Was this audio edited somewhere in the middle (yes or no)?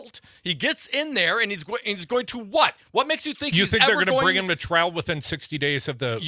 no